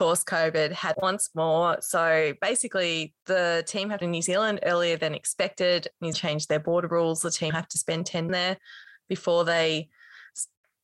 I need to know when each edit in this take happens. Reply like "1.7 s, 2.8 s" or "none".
0.9 s, 3.2 s, 4.0 s, 6.1 s, 7.5 s, 8.3 s